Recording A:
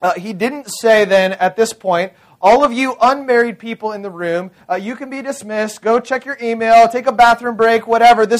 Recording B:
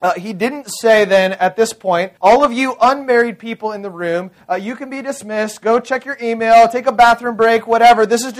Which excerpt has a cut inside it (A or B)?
B